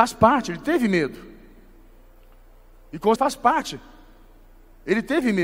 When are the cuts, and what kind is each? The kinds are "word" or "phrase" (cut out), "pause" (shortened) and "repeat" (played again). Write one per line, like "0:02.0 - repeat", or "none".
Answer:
0:03.2 - word